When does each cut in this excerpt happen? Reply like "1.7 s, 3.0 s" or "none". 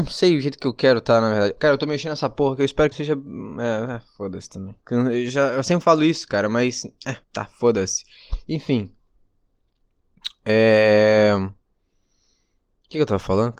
2.9 s, 4.8 s, 7.2 s